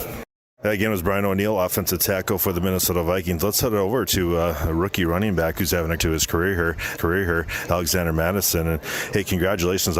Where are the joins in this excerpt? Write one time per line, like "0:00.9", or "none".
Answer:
0:06.0
0:07.0

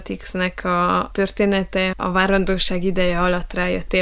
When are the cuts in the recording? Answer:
0:01.9

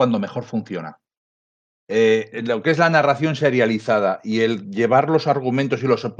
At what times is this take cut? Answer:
none

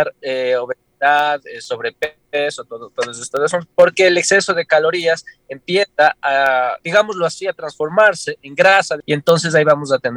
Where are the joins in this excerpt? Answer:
none

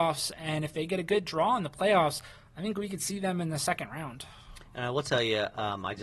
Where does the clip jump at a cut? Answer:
none

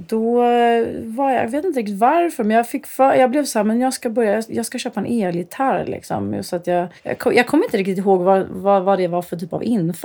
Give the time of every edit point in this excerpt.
0:07.0

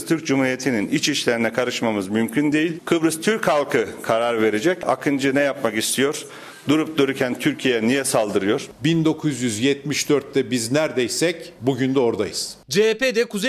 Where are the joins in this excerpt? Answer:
none

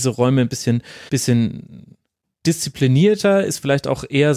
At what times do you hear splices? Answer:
0:01.1

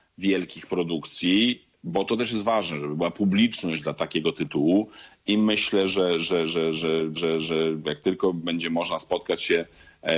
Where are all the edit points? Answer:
0:07.2

